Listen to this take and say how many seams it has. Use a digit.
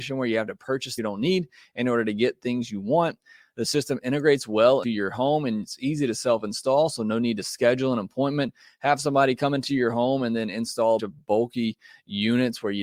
3